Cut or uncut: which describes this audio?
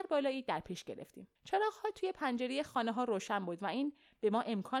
cut